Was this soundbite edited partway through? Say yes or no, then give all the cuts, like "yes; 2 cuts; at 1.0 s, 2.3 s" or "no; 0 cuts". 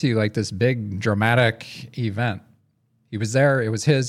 no; 0 cuts